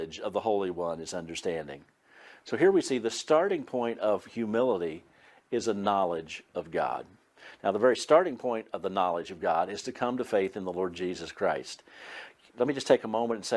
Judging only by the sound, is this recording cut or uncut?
uncut